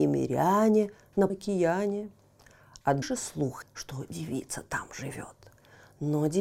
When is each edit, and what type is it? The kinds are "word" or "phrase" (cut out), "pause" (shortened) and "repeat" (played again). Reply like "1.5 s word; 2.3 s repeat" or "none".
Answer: 1.3 s word; 3.0 s word; 3.6 s word

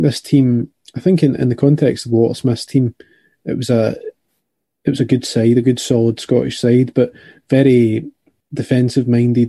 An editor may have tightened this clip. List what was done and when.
none

